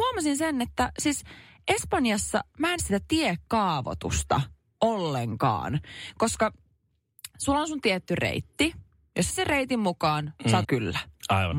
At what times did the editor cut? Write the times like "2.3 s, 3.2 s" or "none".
2.8 s, 9.3 s, 10.6 s